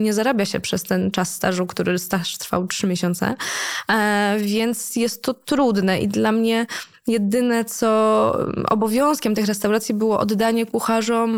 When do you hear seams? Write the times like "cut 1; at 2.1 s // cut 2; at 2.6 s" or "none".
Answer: none